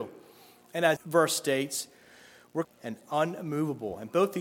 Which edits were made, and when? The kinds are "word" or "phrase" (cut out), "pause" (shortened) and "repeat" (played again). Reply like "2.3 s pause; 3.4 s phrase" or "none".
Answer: 1.0 s word; 2.6 s phrase